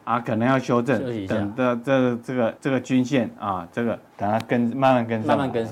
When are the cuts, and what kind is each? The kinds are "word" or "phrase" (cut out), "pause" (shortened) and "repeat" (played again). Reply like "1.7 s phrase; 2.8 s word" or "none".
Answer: 2.6 s pause; 4.1 s pause